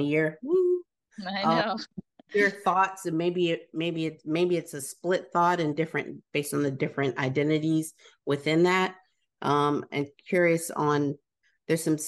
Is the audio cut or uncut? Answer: uncut